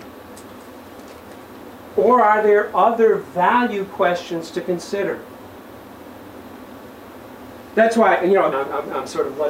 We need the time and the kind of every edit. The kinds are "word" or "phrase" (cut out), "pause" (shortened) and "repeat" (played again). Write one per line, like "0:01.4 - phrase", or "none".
0:08.5 - word

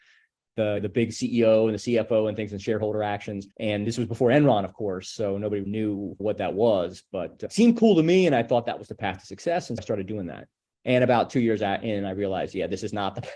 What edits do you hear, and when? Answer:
0:03.5 - pause
0:05.6 - word
0:09.8 - word
0:10.7 - pause

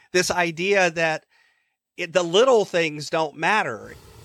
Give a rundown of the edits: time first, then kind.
none

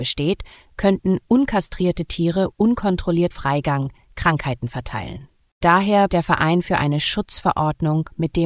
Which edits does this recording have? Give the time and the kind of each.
0:03.3 - word
0:06.1 - word

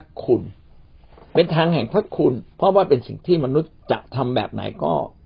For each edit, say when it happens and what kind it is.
0:02.5 - pause
0:03.8 - pause

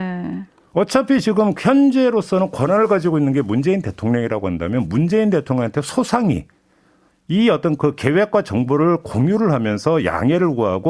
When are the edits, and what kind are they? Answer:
none

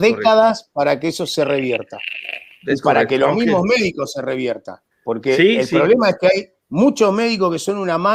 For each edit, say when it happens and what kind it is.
0:04.9 - pause
0:06.6 - pause

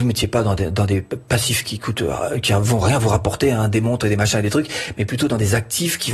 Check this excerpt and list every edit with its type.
none

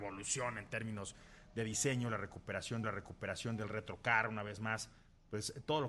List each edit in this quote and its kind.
0:02.8 - repeat

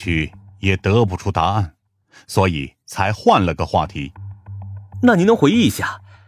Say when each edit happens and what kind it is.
none

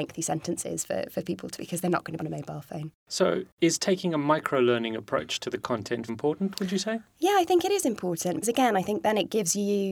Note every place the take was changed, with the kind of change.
0:01.6 - word
0:02.2 - phrase
0:06.1 - word
0:08.4 - word

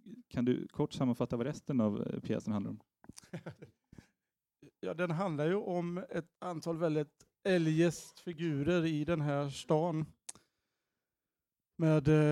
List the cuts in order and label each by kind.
0:06.3 - pause

